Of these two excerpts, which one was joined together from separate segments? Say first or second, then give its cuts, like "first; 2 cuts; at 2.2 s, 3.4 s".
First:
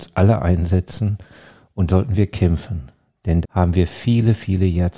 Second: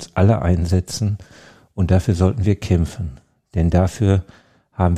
first; 2 cuts; at 1.9 s, 3.4 s